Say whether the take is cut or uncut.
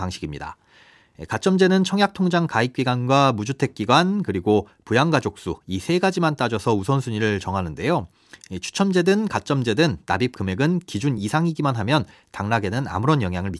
uncut